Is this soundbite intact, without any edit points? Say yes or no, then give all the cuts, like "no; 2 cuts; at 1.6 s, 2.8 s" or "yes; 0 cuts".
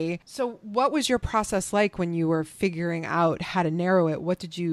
yes; 0 cuts